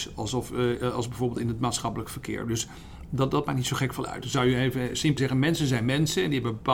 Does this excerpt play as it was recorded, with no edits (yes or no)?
no